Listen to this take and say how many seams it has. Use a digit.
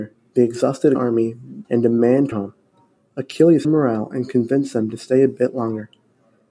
4